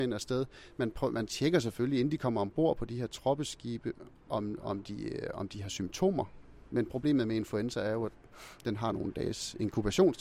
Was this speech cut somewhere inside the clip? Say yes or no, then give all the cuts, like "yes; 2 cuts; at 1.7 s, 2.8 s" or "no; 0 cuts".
no; 0 cuts